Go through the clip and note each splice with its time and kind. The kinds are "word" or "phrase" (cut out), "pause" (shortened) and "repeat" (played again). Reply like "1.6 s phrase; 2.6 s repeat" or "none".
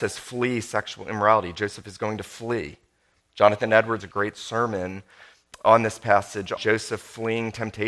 4.0 s word; 6.6 s word